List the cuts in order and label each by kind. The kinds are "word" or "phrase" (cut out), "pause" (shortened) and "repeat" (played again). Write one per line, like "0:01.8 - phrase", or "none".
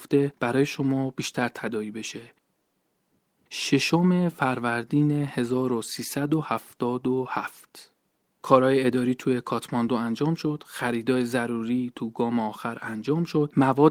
none